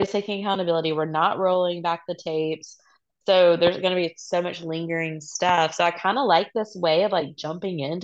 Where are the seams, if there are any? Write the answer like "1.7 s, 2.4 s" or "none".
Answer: none